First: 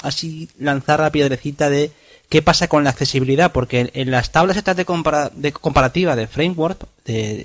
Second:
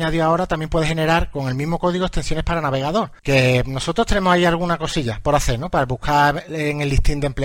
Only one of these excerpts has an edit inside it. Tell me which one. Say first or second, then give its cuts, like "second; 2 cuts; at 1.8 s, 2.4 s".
second; 1 cut; at 3.2 s